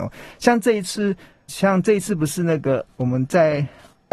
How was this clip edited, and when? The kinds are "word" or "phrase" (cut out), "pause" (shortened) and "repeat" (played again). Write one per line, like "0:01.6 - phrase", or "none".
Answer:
0:01.5 - word